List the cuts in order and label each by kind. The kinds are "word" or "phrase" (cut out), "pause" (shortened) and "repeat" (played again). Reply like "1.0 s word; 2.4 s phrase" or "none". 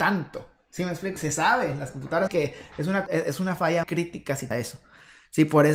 1.2 s word; 2.3 s word; 3.1 s word; 3.8 s word; 4.5 s word